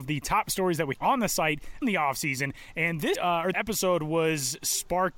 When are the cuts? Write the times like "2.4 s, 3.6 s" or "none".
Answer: 0.9 s, 1.8 s, 3.1 s, 3.5 s